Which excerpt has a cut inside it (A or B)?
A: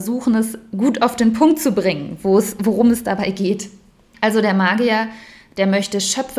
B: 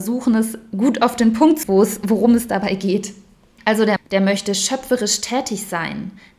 B